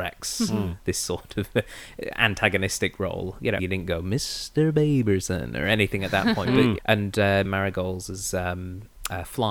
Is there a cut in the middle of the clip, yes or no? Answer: yes